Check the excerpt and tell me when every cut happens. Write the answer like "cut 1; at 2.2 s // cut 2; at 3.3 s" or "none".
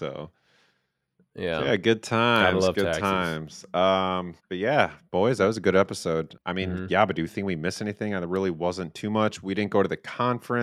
cut 1; at 4.4 s // cut 2; at 6.4 s